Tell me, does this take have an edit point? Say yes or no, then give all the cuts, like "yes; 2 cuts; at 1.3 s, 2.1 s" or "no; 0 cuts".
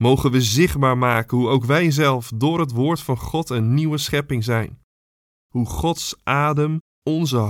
no; 0 cuts